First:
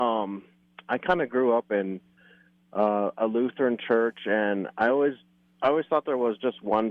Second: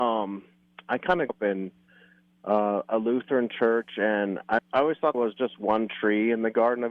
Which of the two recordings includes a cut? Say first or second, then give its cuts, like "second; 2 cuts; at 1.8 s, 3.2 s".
second; 3 cuts; at 1.3 s, 4.6 s, 5.1 s